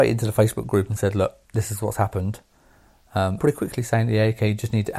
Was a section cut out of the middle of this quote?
yes; 2 cuts; at 1.4 s, 3.4 s

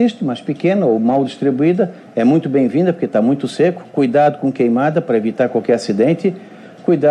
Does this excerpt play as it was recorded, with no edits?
yes; 0 cuts

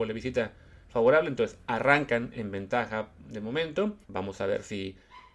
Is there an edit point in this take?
yes; 1 cut; at 4.0 s

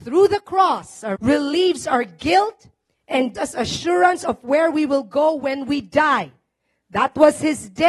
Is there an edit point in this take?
yes; 2 cuts; at 1.2 s, 3.3 s

